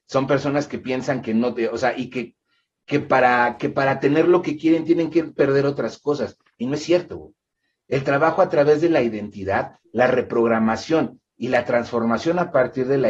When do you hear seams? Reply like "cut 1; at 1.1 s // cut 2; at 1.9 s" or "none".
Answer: none